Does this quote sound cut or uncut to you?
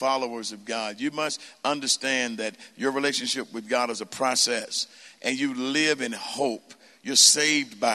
uncut